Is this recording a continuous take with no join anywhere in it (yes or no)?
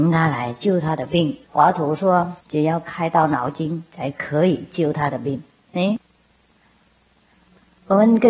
no